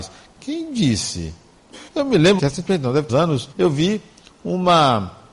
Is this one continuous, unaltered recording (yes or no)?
no